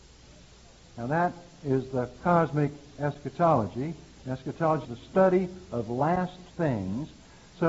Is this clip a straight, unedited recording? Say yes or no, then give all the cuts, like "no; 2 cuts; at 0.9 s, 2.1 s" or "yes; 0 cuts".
no; 2 cuts; at 4.8 s, 6.5 s